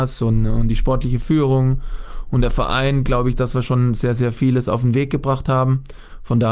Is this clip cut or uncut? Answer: uncut